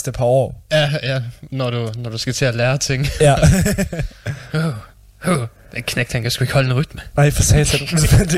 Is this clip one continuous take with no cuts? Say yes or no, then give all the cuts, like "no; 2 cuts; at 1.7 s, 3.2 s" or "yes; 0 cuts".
yes; 0 cuts